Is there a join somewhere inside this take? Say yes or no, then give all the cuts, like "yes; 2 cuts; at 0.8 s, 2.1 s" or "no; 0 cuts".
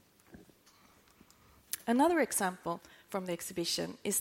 no; 0 cuts